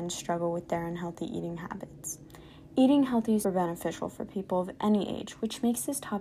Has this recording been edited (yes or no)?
yes